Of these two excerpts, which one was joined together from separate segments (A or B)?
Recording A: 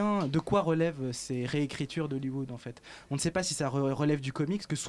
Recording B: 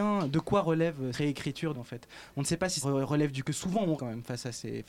B